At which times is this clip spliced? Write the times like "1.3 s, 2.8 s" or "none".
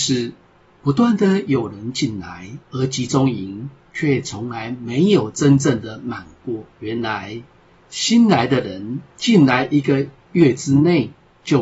2.6 s, 6.7 s